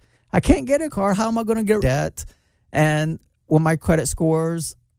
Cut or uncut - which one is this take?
cut